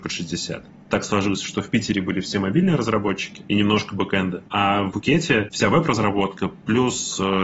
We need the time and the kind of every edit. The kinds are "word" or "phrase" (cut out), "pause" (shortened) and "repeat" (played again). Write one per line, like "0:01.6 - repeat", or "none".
0:04.9 - word